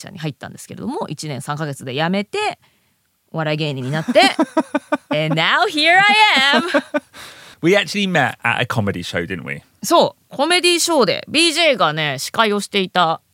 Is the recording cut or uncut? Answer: cut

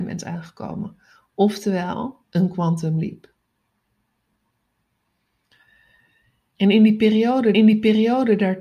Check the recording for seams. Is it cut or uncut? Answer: cut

